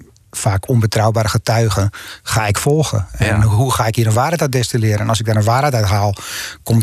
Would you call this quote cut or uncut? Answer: uncut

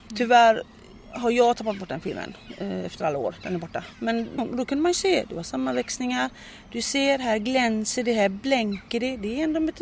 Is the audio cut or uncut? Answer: cut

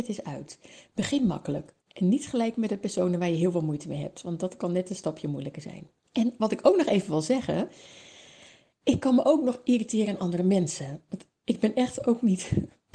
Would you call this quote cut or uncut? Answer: cut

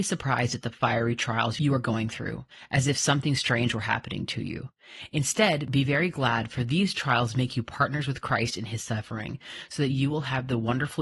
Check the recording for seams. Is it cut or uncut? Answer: uncut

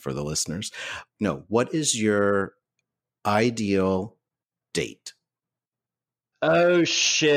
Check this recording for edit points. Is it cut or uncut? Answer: uncut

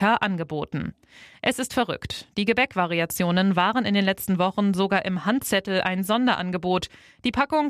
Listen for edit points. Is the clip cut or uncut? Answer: uncut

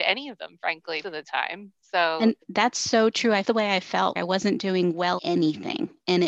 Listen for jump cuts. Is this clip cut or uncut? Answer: cut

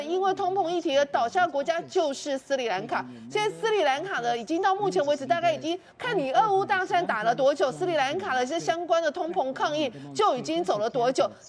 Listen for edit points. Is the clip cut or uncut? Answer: uncut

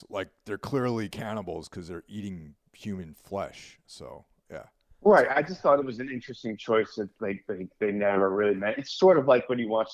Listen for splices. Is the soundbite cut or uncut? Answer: uncut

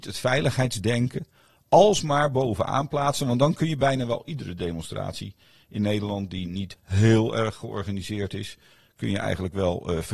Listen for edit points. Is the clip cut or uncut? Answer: uncut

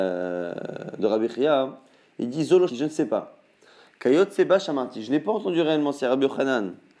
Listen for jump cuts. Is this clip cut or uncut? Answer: cut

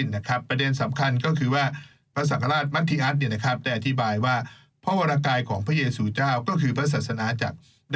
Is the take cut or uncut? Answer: uncut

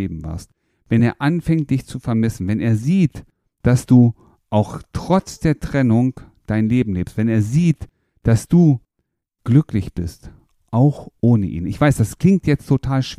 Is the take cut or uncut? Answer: uncut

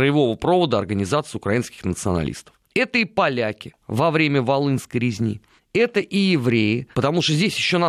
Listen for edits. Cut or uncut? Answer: cut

